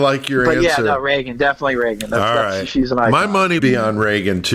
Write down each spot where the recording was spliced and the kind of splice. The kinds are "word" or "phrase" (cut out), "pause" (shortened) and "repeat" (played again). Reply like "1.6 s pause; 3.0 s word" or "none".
3.6 s word